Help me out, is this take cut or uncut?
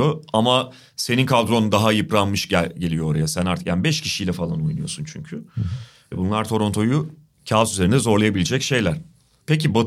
uncut